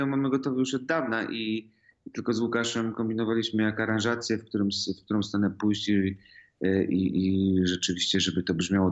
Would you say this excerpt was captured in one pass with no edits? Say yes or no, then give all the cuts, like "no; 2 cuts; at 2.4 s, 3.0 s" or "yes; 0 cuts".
yes; 0 cuts